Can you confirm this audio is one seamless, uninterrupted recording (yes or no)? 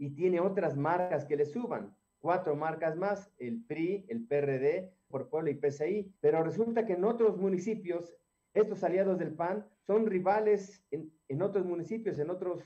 no